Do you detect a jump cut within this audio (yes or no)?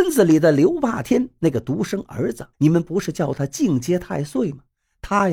yes